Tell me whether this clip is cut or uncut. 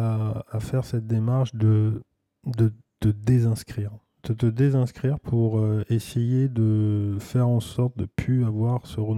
uncut